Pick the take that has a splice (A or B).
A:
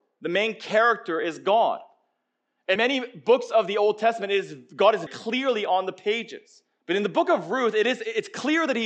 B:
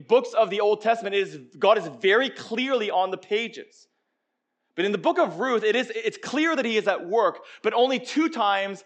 A